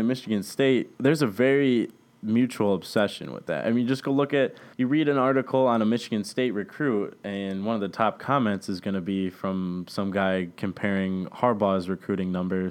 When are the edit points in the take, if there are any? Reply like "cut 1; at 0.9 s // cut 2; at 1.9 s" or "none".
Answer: cut 1; at 0.9 s // cut 2; at 4.7 s